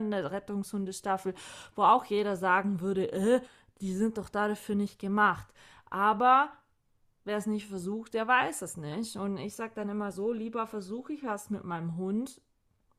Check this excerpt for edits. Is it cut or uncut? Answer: uncut